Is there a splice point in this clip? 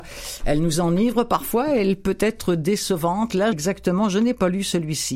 yes; 1 cut; at 3.5 s

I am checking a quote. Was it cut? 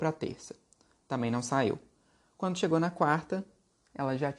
no; 0 cuts

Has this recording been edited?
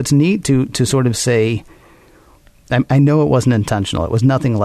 no; 0 cuts

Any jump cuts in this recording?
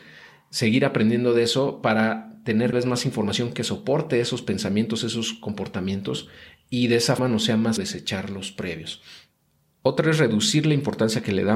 yes; 3 cuts; at 2.7 s, 7.2 s, 7.8 s

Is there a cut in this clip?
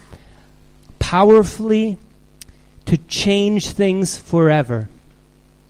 no; 0 cuts

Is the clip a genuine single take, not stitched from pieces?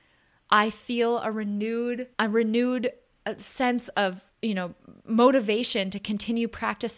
no; 3 cuts; at 2.1 s, 4.3 s, 5.0 s

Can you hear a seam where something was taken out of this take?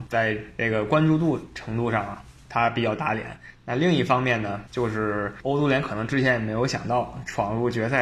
no; 0 cuts

